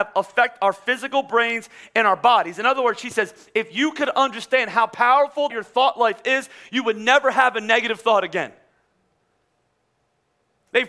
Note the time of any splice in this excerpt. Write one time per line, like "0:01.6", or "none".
0:05.5